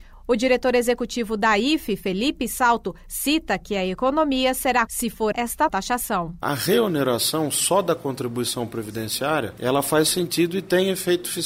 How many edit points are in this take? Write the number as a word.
three